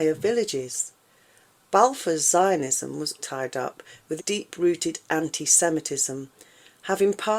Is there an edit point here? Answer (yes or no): yes